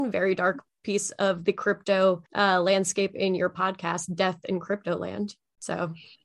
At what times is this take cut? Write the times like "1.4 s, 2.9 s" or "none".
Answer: 2.3 s

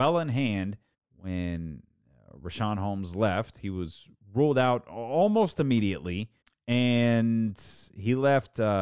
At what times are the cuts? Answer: 0.9 s, 6.4 s

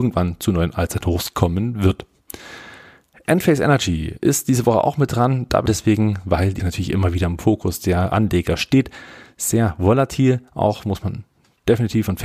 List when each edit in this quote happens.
5.7 s, 6.6 s

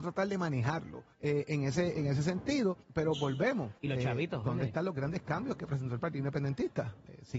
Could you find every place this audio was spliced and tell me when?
1.1 s, 2.8 s, 3.8 s

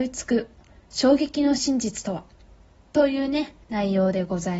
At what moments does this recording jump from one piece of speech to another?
3.6 s

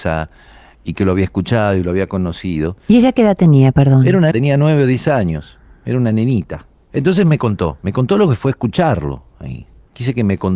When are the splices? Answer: 4.3 s

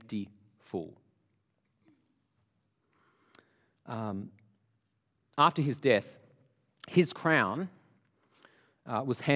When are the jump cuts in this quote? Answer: none

